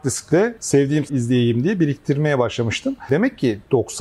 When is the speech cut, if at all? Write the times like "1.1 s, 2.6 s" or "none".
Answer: 1.1 s